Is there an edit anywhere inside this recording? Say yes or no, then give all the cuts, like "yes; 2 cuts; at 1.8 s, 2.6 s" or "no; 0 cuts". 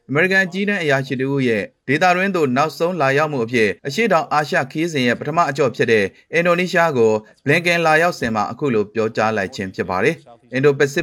yes; 1 cut; at 3.8 s